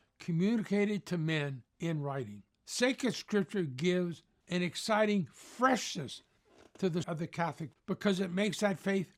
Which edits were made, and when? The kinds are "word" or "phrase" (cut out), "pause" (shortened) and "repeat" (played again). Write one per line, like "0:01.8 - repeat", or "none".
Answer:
0:01.7 - pause
0:02.5 - pause
0:07.0 - word
0:07.7 - word